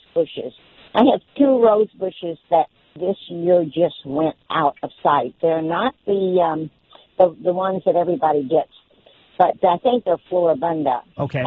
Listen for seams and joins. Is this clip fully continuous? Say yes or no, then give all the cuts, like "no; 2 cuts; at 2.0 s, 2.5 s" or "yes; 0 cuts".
yes; 0 cuts